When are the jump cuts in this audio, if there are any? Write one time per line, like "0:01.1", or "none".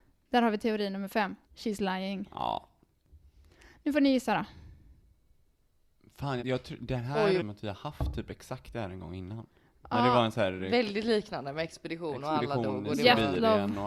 0:01.4
0:06.4
0:07.4

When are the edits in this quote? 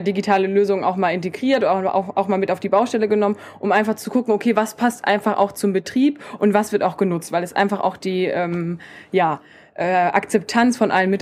none

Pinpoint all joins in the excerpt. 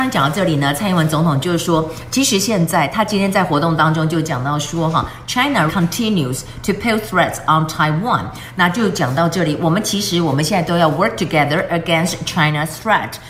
0:05.7

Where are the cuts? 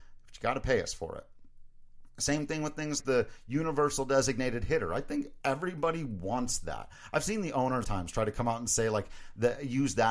0:03.0
0:07.8

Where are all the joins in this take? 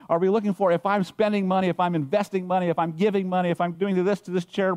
none

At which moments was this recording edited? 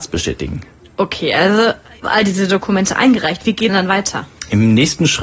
0:02.0
0:03.7

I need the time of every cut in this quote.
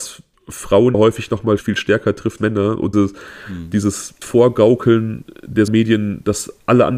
0:00.9
0:01.6
0:02.4
0:02.9
0:04.2
0:05.7

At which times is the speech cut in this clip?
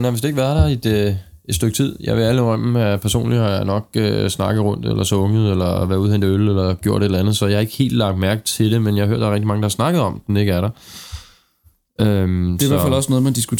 none

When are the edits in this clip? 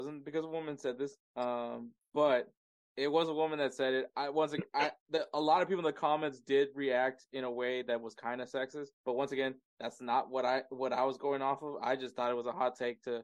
0:01.2
0:02.7
0:08.9

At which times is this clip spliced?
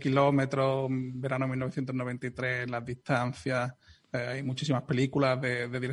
none

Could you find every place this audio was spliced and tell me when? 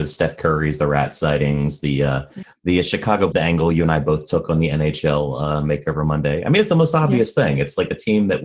0:03.3

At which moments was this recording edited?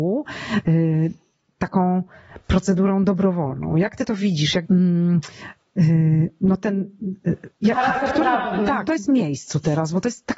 0:04.6
0:08.8

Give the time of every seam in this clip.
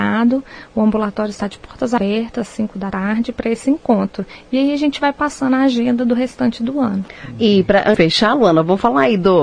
0:08.0

